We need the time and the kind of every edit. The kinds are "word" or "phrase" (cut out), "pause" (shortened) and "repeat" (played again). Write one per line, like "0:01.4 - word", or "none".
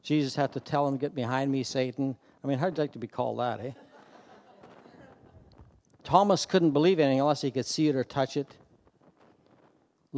none